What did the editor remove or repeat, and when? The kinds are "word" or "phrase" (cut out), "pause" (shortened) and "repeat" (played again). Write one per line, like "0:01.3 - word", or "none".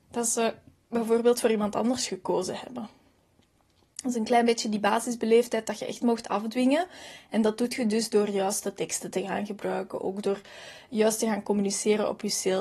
none